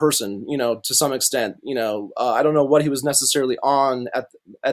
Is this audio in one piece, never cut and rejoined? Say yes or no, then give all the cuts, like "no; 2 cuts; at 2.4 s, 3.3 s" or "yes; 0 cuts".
yes; 0 cuts